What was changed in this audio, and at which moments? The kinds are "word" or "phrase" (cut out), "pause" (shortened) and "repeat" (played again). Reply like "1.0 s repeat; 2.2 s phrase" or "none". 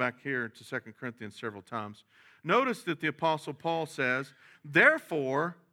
none